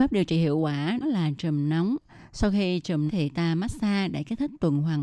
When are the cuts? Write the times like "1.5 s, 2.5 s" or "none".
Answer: 1.0 s, 3.1 s

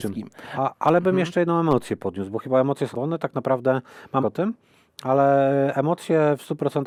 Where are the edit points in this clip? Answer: 2.9 s, 4.2 s

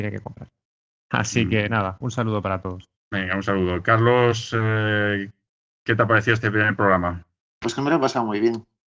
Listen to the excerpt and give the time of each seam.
2.9 s

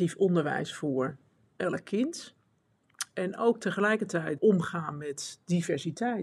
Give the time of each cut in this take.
4.4 s

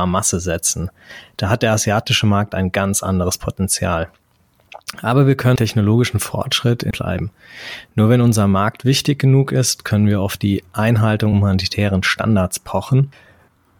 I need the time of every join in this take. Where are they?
5.6 s, 6.9 s, 11.3 s

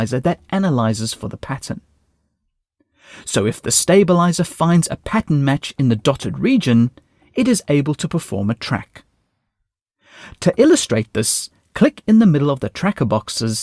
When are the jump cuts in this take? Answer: none

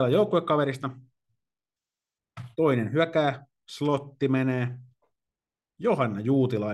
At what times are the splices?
2.5 s

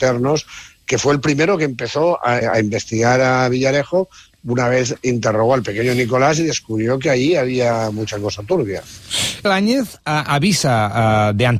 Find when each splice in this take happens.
2.4 s, 9.4 s

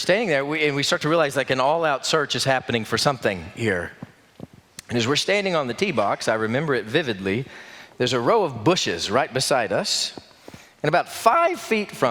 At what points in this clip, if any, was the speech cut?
none

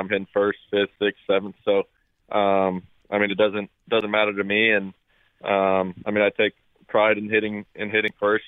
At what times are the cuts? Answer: none

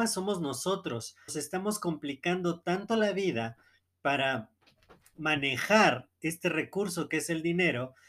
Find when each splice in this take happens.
1.3 s

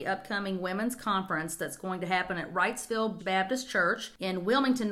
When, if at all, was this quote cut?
3.2 s

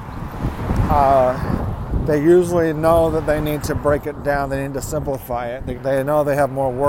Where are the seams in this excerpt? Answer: 5.7 s

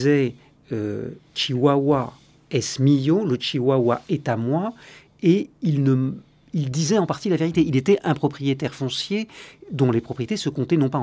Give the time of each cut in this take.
none

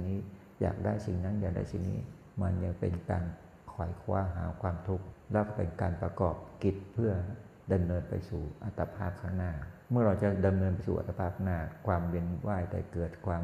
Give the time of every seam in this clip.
2.3 s

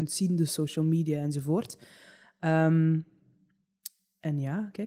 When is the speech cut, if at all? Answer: none

